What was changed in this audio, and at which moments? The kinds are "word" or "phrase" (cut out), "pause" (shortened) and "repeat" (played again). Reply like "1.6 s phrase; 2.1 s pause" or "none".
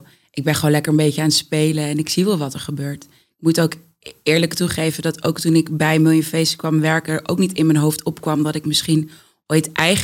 none